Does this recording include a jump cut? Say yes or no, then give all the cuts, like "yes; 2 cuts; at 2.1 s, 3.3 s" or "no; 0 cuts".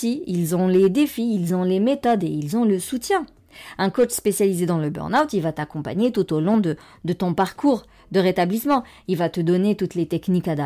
no; 0 cuts